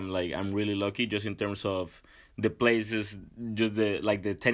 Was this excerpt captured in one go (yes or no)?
yes